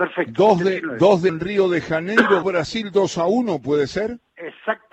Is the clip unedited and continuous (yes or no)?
no